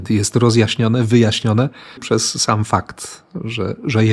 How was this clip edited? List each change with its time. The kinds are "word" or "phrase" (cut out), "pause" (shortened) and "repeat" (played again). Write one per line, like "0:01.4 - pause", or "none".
0:02.0 - word